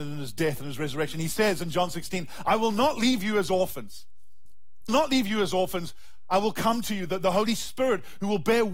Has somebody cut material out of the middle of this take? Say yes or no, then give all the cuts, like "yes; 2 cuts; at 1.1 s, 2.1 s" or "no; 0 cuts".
yes; 1 cut; at 4.9 s